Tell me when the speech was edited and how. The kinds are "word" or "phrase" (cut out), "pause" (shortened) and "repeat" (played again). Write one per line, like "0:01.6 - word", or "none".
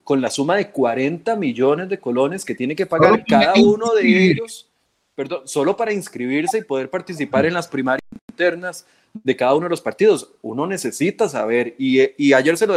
none